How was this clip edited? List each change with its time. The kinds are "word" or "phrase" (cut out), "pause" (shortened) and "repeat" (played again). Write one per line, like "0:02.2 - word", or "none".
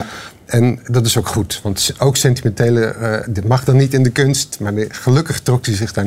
0:03.2 - word